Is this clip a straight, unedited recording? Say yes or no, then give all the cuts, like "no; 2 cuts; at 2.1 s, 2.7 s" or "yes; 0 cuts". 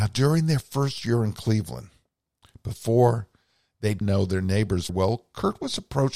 no; 2 cuts; at 4.0 s, 4.9 s